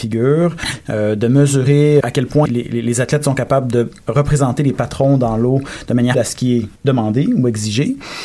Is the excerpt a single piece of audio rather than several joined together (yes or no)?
no